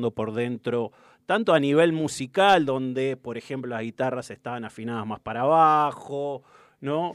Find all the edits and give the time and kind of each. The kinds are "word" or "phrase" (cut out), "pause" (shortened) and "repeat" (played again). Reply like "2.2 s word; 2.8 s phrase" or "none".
none